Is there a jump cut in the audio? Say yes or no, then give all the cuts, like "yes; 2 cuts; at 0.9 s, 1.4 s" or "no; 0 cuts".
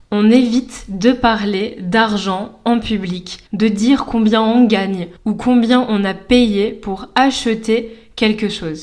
yes; 2 cuts; at 3.5 s, 5.2 s